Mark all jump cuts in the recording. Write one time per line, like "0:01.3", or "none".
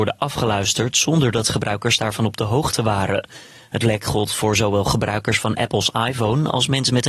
none